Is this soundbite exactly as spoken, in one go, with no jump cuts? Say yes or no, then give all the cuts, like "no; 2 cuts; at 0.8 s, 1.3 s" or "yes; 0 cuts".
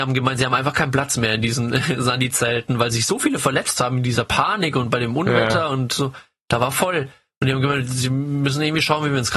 yes; 0 cuts